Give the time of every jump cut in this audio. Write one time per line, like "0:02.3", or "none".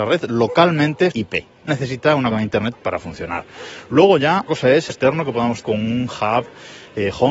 0:01.1
0:01.7
0:02.3
0:02.7
0:04.5
0:04.9
0:05.6